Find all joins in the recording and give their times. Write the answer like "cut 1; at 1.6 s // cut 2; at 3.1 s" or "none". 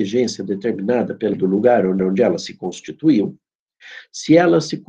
cut 1; at 1.3 s // cut 2; at 2.0 s